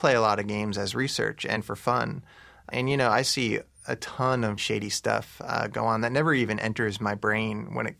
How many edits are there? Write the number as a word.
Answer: one